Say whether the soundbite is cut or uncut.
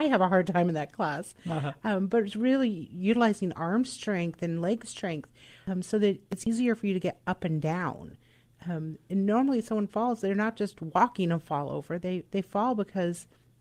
uncut